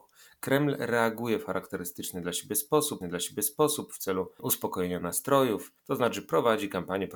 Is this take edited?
yes; 2 cuts; at 3.0 s, 5.8 s

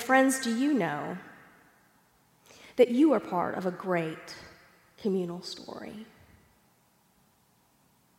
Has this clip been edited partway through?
no; 0 cuts

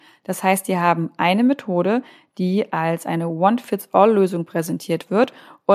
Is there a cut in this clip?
no; 0 cuts

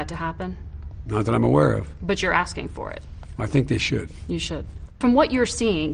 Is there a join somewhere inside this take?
no; 0 cuts

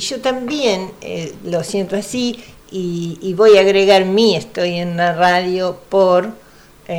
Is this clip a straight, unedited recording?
yes; 0 cuts

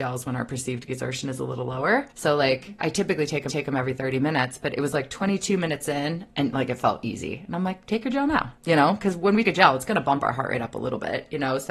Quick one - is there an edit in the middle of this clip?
yes; 4 cuts; at 2.1 s, 3.5 s, 8.6 s, 9.4 s

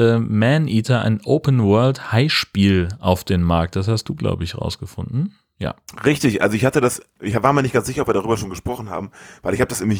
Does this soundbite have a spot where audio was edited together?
no; 0 cuts

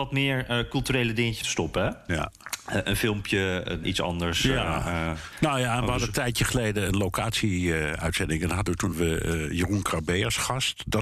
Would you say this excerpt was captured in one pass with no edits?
no; 3 cuts; at 1.4 s, 3.8 s, 8.9 s

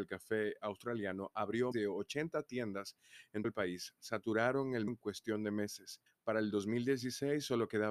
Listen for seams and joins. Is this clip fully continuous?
no; 4 cuts; at 1.7 s, 3.4 s, 4.9 s, 6.1 s

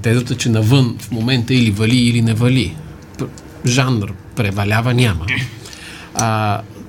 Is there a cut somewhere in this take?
no; 0 cuts

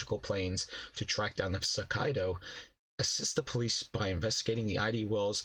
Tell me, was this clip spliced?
yes; 1 cut; at 1.6 s

